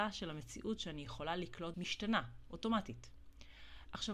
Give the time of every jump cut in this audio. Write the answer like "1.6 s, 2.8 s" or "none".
1.7 s